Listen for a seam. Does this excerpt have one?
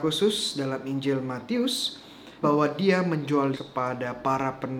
yes; 2 cuts; at 2.4 s, 3.5 s

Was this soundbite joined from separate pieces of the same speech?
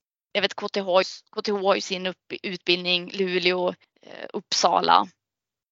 yes; 2 cuts; at 1.0 s, 3.8 s

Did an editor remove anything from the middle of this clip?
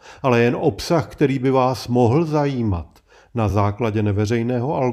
no; 0 cuts

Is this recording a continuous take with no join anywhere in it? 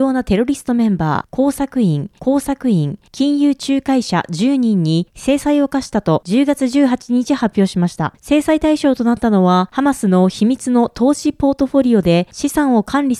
no; 1 cut; at 2.2 s

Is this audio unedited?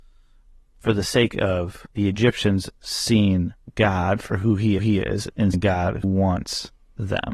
no; 4 cuts; at 1.9 s, 4.8 s, 5.5 s, 6.0 s

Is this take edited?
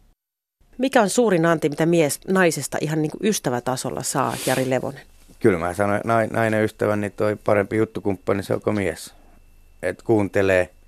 no; 0 cuts

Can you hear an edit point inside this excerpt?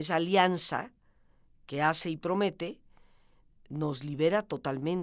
no; 0 cuts

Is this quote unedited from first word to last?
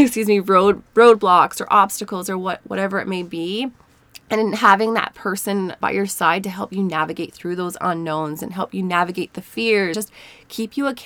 no; 2 cuts; at 5.8 s, 9.9 s

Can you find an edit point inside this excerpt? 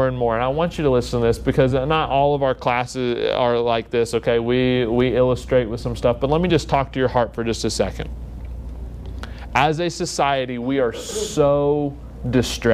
no; 0 cuts

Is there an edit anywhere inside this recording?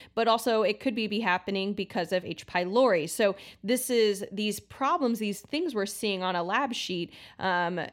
no; 0 cuts

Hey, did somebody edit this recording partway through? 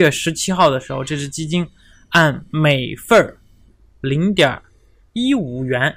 no; 0 cuts

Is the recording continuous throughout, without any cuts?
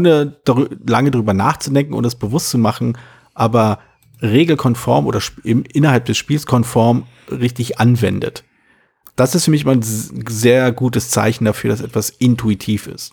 yes; 0 cuts

